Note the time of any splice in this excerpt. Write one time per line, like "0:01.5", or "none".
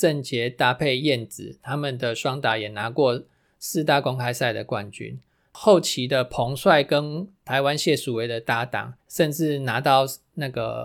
0:09.0